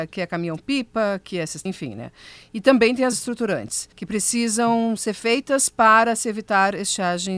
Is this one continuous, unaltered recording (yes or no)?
no